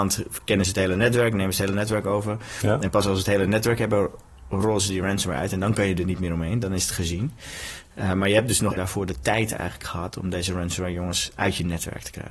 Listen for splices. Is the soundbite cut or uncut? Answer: cut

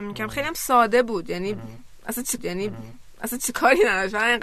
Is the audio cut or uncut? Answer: cut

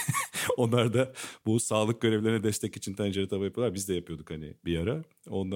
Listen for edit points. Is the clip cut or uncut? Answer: uncut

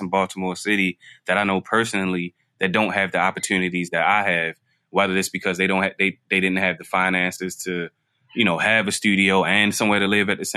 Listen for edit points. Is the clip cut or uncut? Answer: uncut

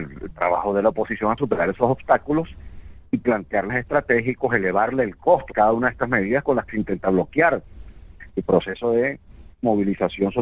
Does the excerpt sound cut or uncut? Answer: cut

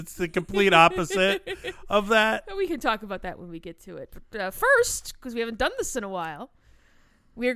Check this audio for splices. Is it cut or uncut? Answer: uncut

